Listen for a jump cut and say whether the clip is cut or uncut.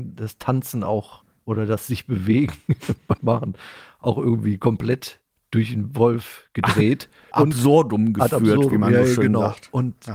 cut